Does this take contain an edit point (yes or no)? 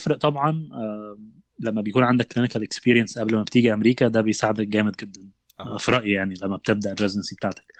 no